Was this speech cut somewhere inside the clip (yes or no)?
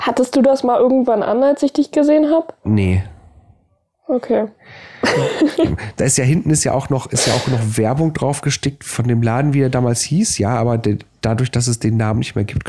no